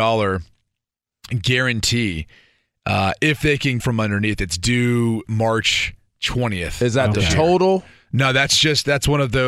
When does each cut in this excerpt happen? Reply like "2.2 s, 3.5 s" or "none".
3.8 s